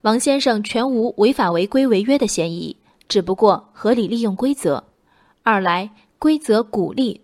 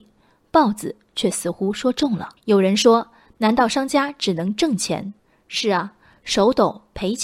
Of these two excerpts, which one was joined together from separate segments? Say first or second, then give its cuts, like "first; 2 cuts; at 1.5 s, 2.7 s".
second; 2 cuts; at 2.4 s, 5.2 s